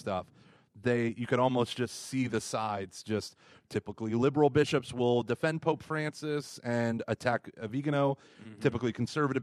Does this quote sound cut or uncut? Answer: uncut